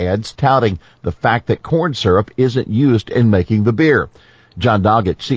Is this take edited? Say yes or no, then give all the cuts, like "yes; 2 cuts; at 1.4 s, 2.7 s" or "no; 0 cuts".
no; 0 cuts